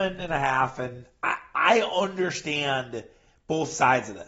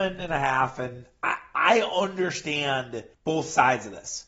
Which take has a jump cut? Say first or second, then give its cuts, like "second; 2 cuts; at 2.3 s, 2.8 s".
second; 1 cut; at 3.1 s